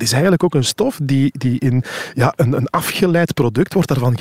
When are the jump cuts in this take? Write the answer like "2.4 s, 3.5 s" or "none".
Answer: none